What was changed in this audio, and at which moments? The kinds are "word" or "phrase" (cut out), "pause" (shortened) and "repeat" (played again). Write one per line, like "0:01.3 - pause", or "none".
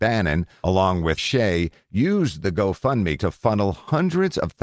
0:01.2 - phrase
0:03.2 - word

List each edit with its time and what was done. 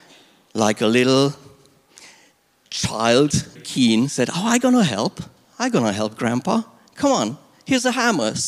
0:03.6 - word

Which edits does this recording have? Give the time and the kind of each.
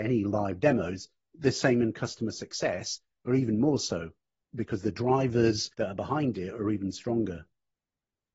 0:05.7 - pause

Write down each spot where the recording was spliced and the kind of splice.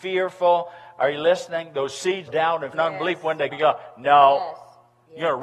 0:02.3 - word
0:02.7 - word
0:03.5 - word

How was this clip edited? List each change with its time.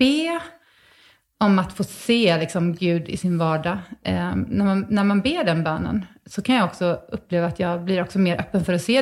none

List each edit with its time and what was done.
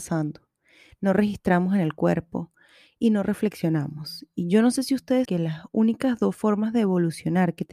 0:05.2 - word

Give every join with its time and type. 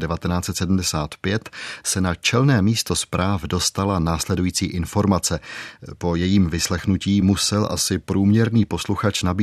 none

